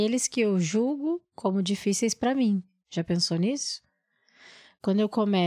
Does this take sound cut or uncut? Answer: uncut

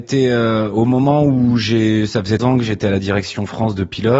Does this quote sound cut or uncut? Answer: cut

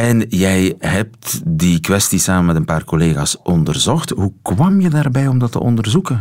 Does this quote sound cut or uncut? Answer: uncut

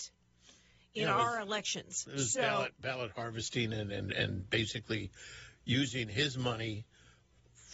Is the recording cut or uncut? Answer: uncut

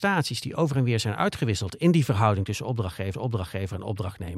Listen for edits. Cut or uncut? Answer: cut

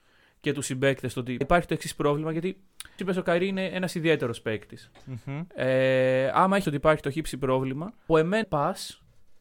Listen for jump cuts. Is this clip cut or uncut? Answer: cut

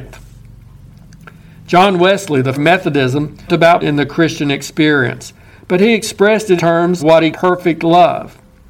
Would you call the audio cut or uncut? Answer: cut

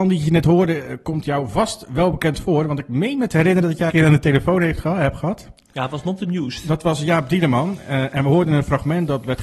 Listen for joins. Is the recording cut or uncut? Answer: cut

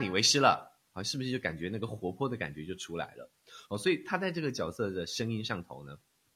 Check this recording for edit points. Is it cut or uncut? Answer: uncut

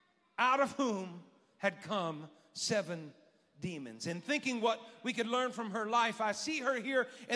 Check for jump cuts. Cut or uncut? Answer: uncut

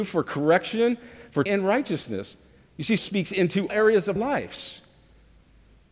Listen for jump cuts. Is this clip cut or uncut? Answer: cut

